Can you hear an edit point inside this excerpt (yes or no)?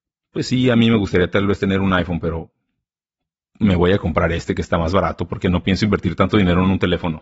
no